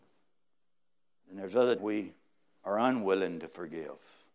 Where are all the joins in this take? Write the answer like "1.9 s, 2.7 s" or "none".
1.8 s